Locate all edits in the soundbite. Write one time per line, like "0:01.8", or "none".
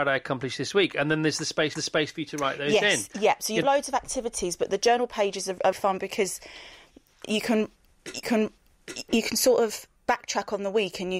0:01.8
0:03.6
0:05.7
0:08.2
0:10.0